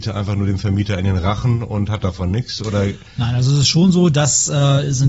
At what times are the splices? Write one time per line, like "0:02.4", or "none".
none